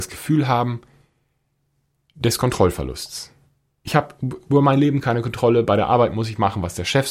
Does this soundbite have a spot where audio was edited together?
no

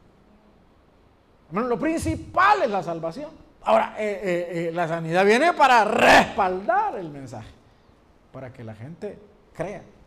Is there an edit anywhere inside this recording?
yes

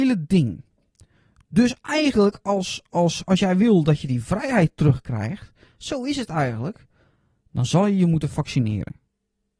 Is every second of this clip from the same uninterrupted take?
yes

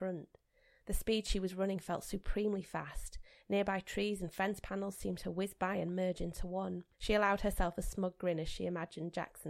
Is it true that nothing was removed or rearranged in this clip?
no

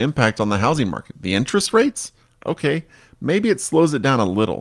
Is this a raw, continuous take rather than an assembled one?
yes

